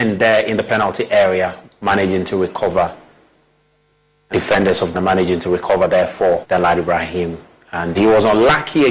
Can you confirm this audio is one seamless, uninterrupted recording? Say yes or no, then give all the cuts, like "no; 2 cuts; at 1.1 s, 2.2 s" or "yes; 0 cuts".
no; 5 cuts; at 1.6 s, 4.3 s, 4.9 s, 6.4 s, 7.9 s